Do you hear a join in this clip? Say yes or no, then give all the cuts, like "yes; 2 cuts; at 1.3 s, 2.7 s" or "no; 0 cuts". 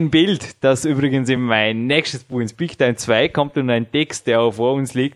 no; 0 cuts